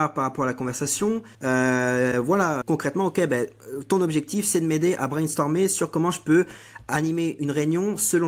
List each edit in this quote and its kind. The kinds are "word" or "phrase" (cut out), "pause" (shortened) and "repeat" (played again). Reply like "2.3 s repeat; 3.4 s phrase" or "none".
1.3 s pause; 2.6 s word